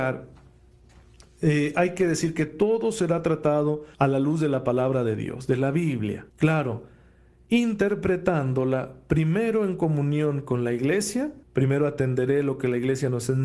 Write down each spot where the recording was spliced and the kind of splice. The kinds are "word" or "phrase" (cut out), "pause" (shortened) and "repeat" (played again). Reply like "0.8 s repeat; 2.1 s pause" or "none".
3.9 s pause; 6.3 s pause; 11.4 s pause